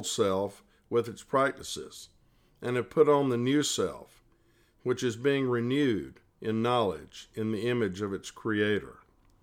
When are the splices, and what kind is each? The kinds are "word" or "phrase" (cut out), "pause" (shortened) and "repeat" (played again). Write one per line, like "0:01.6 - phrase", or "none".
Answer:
none